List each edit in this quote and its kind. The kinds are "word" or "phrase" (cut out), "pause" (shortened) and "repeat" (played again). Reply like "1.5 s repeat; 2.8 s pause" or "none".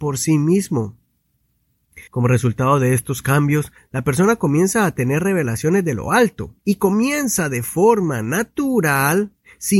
2.1 s pause; 6.6 s pause

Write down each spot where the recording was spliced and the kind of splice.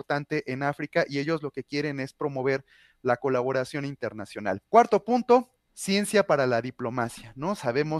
4.7 s pause; 5.7 s pause

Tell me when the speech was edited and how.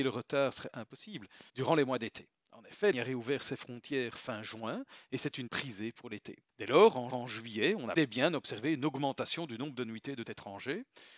1.5 s pause; 2.9 s word; 5.5 s word; 6.5 s pause; 7.1 s repeat; 8.0 s word; 10.2 s word

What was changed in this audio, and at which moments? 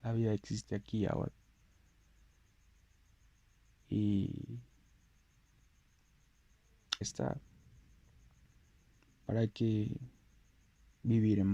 7.0 s word

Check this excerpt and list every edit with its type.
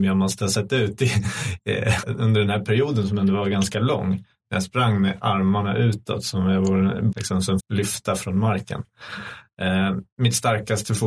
2.0 s word; 7.1 s word; 7.6 s word

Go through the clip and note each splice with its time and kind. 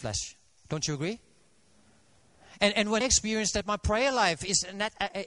3.0 s word

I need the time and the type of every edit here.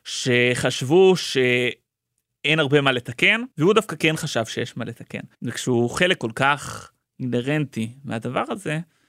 3.5 s pause; 5.3 s pause

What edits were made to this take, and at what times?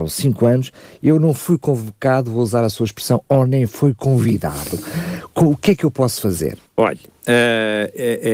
6.7 s pause

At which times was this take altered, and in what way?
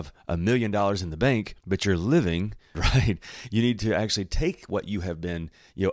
1.6 s pause; 2.7 s phrase

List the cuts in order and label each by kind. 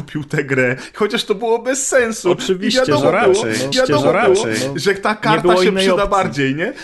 3.7 s repeat

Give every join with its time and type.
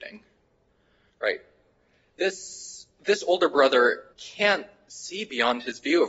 4.1 s pause

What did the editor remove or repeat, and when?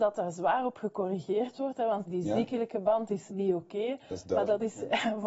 2.1 s word; 3.3 s word

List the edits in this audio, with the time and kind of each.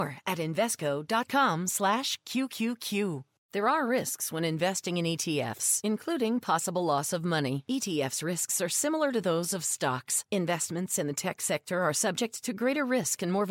none

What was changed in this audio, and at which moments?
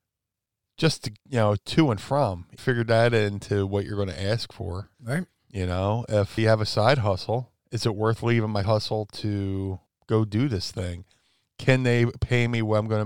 1.2 s pause; 2.6 s word; 4.9 s pause; 6.4 s word; 7.6 s pause; 8.6 s word; 9.9 s pause

